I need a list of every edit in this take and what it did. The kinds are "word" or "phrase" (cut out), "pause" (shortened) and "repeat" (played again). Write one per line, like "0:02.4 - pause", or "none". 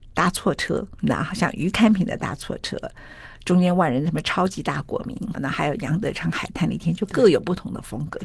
0:05.3 - word